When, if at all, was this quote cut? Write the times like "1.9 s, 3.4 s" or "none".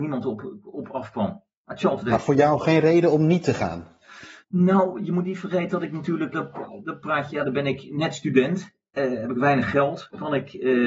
4.4 s, 6.3 s